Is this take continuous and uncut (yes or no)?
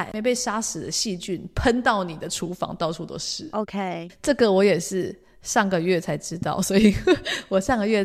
yes